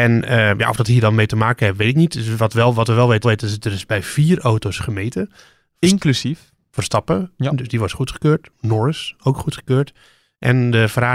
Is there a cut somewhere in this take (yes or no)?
yes